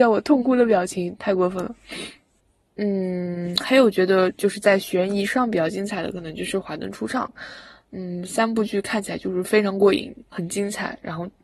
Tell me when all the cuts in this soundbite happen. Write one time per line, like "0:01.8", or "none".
0:10.3